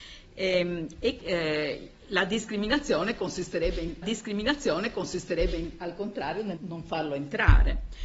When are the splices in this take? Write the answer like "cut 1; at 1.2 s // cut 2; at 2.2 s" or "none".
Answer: cut 1; at 1.2 s // cut 2; at 4.0 s // cut 3; at 6.6 s